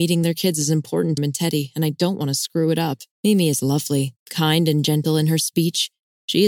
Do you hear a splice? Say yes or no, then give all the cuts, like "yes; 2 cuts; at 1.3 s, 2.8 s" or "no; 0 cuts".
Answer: yes; 3 cuts; at 1.2 s, 3.1 s, 4.2 s